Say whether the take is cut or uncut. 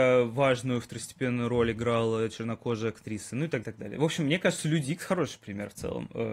cut